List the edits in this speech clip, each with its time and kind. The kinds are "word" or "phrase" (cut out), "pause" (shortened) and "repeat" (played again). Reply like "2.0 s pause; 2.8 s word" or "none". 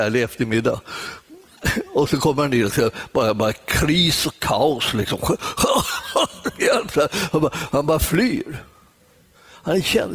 none